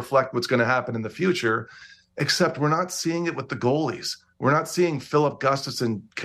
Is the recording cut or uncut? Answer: uncut